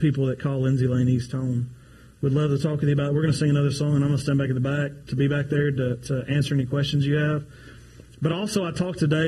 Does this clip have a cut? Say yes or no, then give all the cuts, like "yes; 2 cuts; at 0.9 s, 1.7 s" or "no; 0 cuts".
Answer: no; 0 cuts